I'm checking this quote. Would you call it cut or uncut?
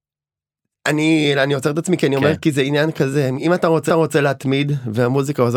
cut